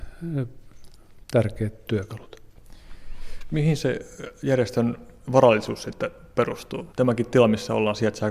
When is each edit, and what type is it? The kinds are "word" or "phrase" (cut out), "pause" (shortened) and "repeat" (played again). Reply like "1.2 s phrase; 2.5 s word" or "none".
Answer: 1.2 s pause; 6.9 s pause